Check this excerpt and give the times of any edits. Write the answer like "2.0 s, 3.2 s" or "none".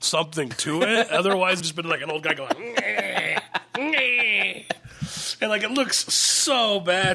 1.6 s